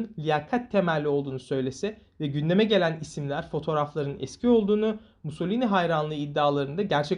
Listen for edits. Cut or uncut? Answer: uncut